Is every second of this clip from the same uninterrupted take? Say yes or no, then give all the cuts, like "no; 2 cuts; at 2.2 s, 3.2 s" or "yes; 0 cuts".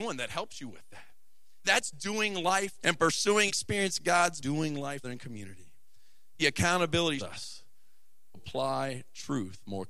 no; 8 cuts; at 1.6 s, 2.8 s, 3.5 s, 4.4 s, 5.0 s, 6.4 s, 7.2 s, 8.3 s